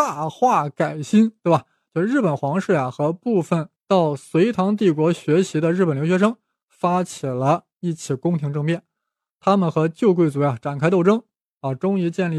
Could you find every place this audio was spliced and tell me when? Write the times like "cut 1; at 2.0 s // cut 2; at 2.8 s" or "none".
none